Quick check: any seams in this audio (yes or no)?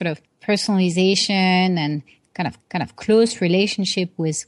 yes